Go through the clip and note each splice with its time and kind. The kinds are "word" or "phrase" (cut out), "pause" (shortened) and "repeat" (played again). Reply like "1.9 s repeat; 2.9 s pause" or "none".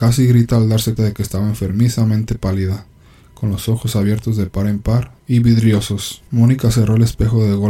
1.0 s word; 5.2 s pause; 6.3 s pause

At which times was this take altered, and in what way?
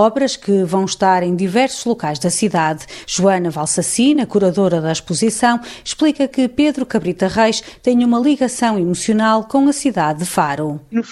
none

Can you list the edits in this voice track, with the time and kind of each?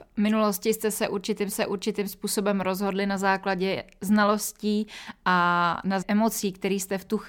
1.5 s repeat; 6.0 s word

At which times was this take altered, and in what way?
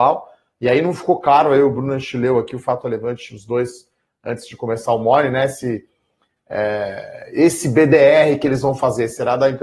none

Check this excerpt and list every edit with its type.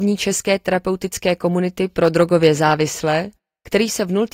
none

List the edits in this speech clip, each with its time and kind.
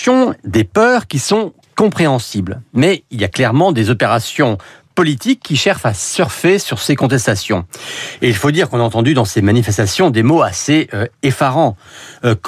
none

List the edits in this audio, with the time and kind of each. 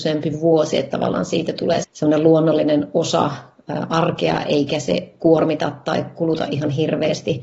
1.8 s word

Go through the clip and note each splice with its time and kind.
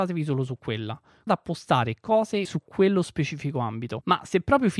1.3 s word; 2.4 s word

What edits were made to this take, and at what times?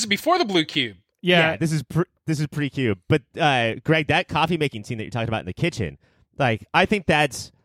1.1 s pause

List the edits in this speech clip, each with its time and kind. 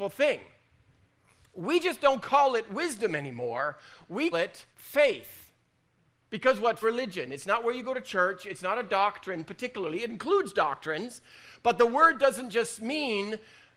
4.3 s word; 4.7 s pause; 6.8 s phrase

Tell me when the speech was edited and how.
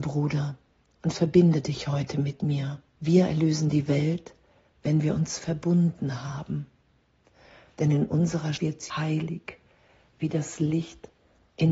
2.9 s pause; 8.6 s word; 8.9 s word

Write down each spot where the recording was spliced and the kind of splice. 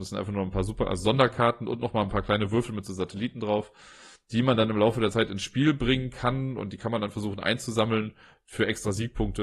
none

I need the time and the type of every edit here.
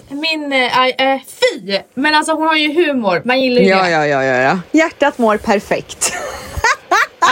none

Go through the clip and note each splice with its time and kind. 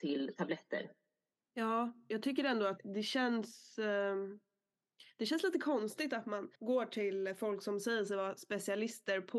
1.3 s pause; 2.8 s word; 6.5 s pause

